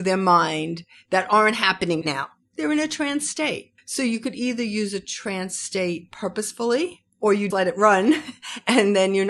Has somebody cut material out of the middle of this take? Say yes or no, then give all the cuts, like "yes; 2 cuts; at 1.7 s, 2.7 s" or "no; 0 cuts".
yes; 2 cuts; at 2.0 s, 7.5 s